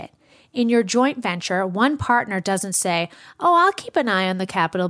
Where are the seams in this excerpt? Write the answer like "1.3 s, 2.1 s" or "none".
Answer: none